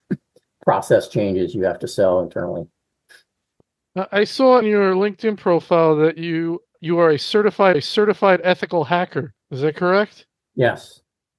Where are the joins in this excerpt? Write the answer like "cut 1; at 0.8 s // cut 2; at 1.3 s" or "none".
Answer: cut 1; at 4.6 s // cut 2; at 6.7 s // cut 3; at 7.7 s // cut 4; at 9.4 s